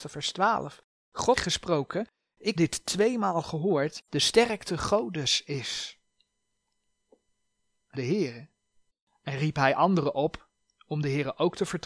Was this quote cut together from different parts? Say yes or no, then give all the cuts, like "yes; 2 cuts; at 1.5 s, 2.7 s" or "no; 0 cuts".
yes; 5 cuts; at 1.4 s, 2.6 s, 4.1 s, 7.9 s, 8.9 s